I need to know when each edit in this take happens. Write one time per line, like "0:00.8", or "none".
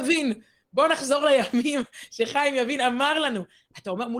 none